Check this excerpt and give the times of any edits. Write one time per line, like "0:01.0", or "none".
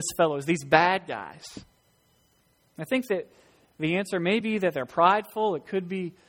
none